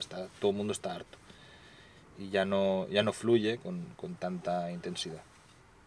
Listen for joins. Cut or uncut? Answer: uncut